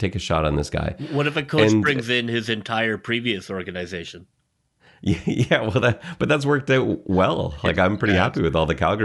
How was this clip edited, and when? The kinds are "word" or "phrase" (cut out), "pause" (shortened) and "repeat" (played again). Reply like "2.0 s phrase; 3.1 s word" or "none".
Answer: none